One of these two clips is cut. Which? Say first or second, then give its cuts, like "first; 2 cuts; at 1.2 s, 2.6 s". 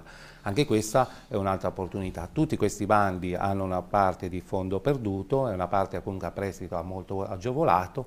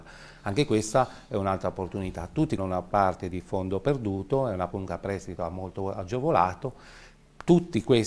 second; 2 cuts; at 2.6 s, 4.7 s